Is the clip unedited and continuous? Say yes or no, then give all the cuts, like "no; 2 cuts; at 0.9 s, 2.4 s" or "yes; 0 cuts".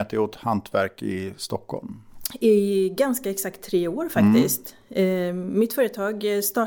yes; 0 cuts